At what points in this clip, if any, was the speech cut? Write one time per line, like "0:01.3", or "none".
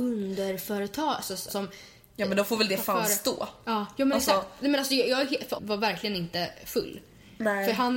0:01.5
0:05.6